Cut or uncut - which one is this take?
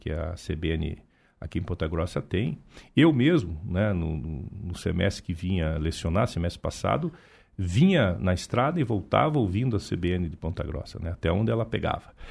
uncut